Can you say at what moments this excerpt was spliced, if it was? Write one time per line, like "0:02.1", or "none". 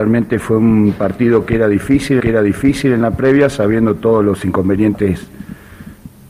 0:02.2